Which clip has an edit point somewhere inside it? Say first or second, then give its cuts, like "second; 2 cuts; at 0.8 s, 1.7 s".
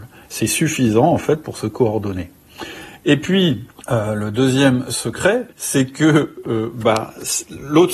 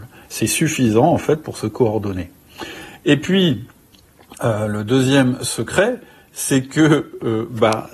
first; 2 cuts; at 3.8 s, 5.5 s